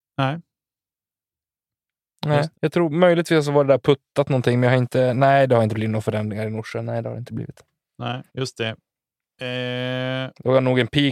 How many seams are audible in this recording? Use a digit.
2